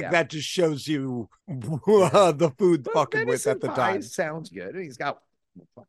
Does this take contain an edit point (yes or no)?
yes